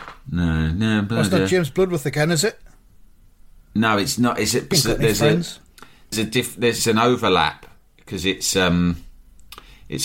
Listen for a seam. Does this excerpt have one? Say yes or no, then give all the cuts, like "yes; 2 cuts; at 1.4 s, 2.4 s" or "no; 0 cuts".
yes; 3 cuts; at 4.7 s, 6.1 s, 6.8 s